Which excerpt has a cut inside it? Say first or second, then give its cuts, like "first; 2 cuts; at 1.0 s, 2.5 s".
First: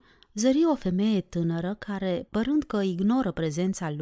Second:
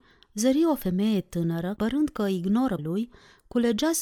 second; 2 cuts; at 1.8 s, 2.8 s